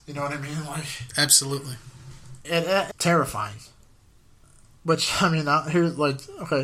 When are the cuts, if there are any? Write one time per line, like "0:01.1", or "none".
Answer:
0:02.4
0:02.9